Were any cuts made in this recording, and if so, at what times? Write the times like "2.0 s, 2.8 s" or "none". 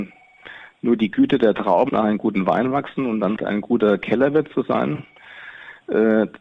1.9 s, 3.4 s